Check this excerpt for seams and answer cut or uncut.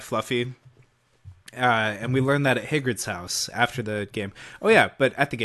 cut